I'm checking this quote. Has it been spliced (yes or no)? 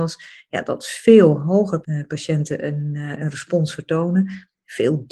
yes